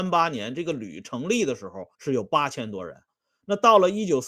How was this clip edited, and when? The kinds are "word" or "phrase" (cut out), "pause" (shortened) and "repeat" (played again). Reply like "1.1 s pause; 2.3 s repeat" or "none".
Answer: 1.9 s pause